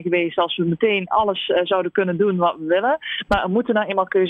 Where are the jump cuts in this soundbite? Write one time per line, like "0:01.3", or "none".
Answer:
none